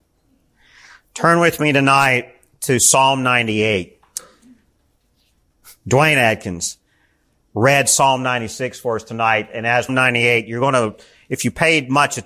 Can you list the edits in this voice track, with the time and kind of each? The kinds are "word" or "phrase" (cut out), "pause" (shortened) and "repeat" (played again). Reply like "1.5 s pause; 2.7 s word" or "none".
9.9 s phrase